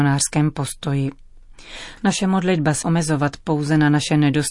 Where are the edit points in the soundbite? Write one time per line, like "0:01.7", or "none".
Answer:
0:02.8